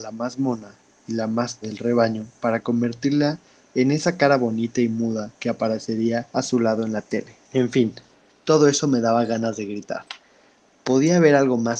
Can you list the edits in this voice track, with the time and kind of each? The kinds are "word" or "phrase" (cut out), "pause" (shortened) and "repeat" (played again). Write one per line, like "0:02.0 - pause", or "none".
0:01.6 - word
0:05.4 - pause
0:06.3 - pause
0:07.4 - pause